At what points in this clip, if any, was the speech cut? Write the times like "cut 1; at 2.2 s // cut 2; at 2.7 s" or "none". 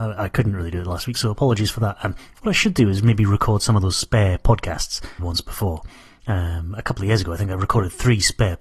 cut 1; at 5.2 s